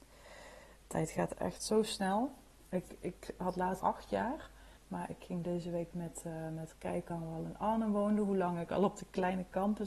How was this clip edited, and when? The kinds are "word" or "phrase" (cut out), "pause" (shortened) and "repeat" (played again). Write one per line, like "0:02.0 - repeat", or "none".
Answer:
0:01.3 - word
0:03.8 - phrase
0:04.8 - pause
0:05.9 - word
0:06.7 - word
0:07.1 - word